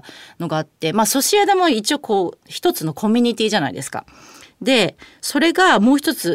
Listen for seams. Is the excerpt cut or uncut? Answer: uncut